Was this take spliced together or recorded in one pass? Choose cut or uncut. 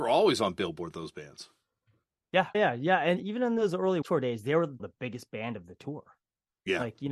cut